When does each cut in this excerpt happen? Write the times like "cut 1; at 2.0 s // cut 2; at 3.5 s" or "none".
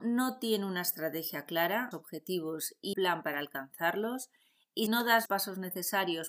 cut 1; at 1.9 s // cut 2; at 2.9 s // cut 3; at 4.9 s // cut 4; at 5.3 s